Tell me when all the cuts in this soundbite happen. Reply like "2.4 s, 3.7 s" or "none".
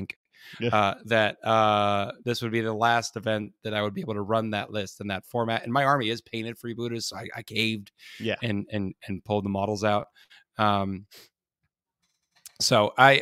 none